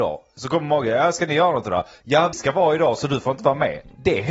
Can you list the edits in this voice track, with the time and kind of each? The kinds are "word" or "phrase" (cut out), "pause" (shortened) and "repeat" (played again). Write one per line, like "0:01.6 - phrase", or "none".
0:02.3 - word